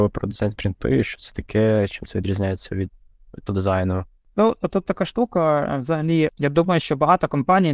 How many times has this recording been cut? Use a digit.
1